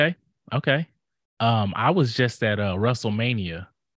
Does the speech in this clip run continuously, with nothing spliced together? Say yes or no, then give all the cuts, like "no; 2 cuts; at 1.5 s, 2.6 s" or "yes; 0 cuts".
yes; 0 cuts